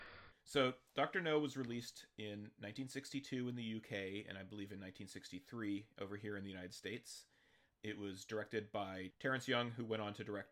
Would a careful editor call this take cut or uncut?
uncut